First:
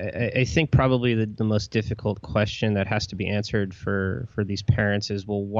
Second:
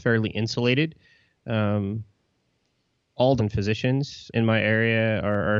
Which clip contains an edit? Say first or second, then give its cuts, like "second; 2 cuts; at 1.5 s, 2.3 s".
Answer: second; 2 cuts; at 3.4 s, 4.3 s